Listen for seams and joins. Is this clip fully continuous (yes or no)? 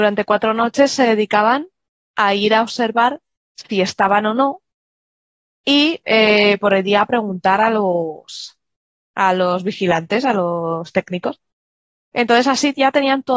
yes